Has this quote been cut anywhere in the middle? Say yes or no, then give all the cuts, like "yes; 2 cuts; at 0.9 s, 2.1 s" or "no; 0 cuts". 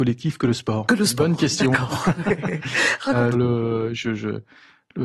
yes; 1 cut; at 3.3 s